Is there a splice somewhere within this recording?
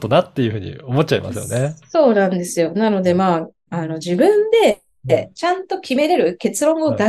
yes; 1 cut; at 3.7 s

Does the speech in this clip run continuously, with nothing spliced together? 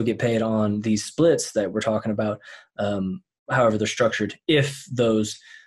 yes; 0 cuts

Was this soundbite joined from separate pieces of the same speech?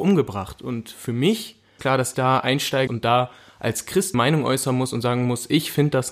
yes; 4 cuts; at 1.8 s, 2.1 s, 2.9 s, 4.1 s

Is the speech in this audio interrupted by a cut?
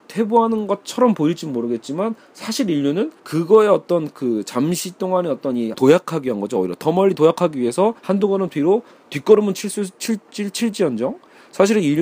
yes; 4 cuts; at 3.2 s, 5.7 s, 8.0 s, 9.0 s

